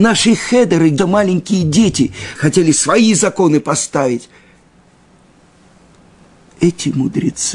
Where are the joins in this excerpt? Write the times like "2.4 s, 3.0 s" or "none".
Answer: 1.0 s, 2.4 s